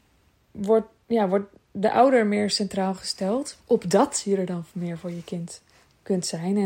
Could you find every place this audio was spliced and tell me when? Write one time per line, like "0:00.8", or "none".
0:03.6

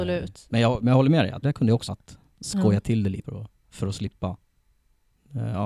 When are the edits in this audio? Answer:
0:01.4
0:01.9
0:03.2

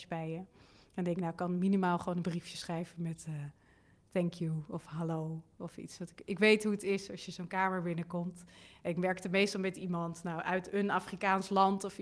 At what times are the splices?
none

